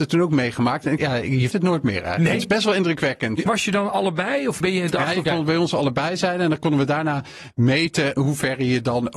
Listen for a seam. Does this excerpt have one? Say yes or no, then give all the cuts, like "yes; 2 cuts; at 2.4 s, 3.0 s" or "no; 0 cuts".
yes; 4 cuts; at 1.0 s, 1.5 s, 4.6 s, 8.2 s